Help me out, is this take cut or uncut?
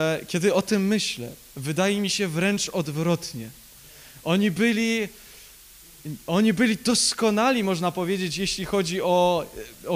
uncut